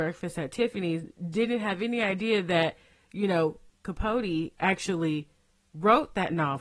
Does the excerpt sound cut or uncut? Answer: uncut